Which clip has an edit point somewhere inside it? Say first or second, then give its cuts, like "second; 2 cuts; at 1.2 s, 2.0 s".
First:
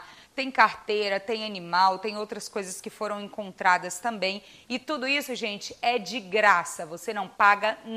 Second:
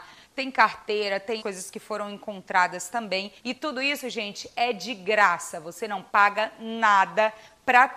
second; 2 cuts; at 1.4 s, 3.4 s